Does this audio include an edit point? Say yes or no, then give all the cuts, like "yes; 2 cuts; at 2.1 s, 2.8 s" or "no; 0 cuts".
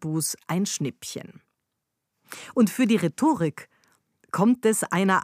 no; 0 cuts